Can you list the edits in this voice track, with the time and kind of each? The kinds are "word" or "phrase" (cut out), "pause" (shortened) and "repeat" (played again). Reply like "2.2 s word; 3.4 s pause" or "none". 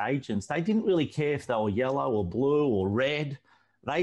none